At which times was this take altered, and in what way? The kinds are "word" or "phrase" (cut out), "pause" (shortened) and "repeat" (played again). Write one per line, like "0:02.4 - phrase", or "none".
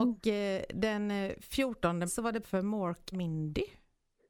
0:02.1 - word
0:02.4 - word
0:03.1 - word